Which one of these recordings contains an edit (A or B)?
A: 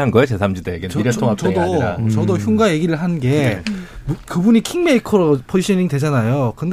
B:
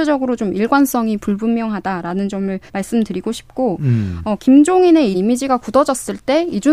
B